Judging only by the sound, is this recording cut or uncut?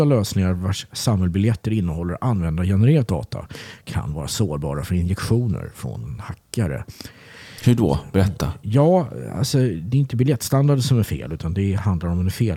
uncut